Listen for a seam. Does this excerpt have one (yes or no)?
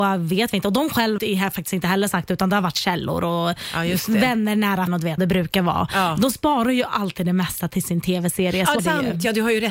yes